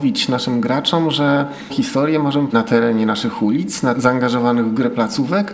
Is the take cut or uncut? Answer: cut